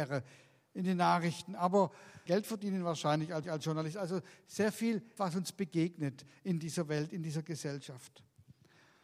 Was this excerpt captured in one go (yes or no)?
no